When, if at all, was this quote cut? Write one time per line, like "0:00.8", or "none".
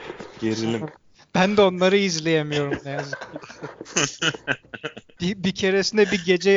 none